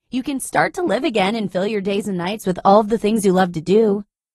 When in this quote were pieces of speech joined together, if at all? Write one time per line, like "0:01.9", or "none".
none